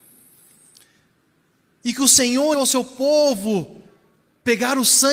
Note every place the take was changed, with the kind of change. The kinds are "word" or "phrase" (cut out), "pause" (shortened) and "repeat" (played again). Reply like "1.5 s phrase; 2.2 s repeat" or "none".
2.5 s word